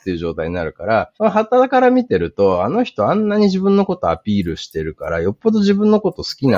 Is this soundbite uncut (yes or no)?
no